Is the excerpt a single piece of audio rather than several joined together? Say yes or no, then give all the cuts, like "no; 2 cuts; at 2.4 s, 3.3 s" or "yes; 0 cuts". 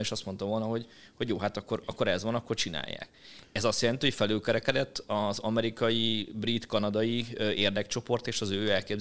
yes; 0 cuts